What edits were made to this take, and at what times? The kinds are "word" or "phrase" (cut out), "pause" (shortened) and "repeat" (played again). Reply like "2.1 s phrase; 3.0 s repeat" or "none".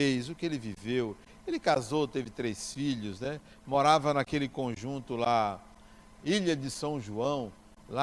none

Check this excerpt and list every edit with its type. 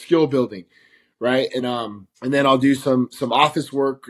1.6 s word; 2.2 s pause

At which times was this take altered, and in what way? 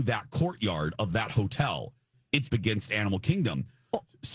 2.5 s phrase

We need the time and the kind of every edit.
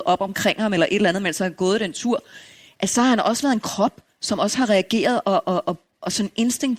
none

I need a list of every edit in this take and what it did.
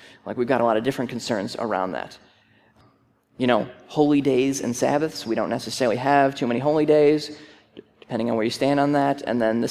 none

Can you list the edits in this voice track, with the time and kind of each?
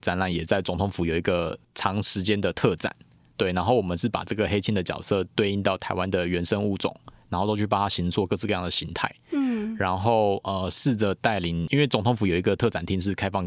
none

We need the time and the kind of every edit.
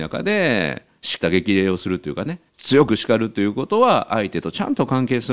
2.5 s pause

